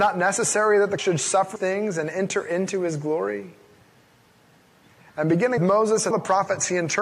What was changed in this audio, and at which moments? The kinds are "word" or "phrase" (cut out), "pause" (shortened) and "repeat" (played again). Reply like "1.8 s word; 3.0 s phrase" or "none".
1.0 s word; 1.6 s word; 5.6 s word; 6.1 s word